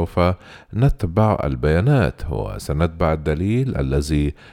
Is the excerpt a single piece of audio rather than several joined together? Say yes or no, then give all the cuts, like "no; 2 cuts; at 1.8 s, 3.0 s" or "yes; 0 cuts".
yes; 0 cuts